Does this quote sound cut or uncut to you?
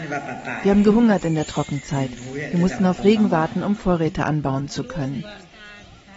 uncut